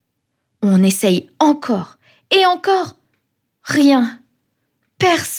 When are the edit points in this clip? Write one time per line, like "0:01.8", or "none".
none